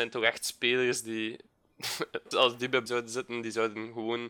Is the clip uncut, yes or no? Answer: no